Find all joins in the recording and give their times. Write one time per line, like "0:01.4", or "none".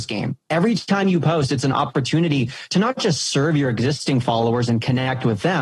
none